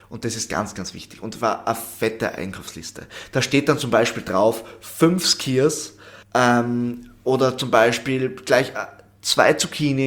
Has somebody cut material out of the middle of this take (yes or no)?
yes